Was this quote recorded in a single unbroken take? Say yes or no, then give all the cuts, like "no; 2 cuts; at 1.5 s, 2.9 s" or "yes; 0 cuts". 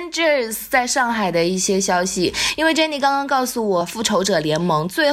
no; 1 cut; at 3.8 s